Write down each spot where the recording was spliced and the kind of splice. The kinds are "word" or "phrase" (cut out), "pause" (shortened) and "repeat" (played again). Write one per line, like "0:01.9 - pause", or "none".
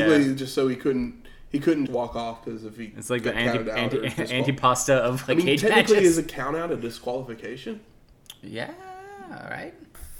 0:01.9 - word